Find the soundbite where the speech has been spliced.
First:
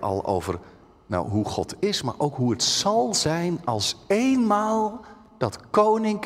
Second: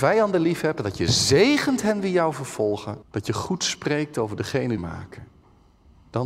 second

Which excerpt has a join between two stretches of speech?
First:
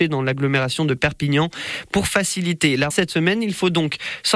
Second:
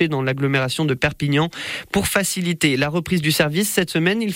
first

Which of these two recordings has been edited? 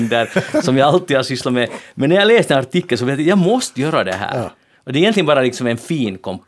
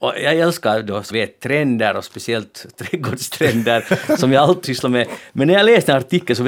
second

